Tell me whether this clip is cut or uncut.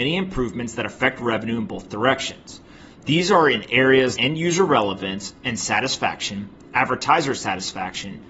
cut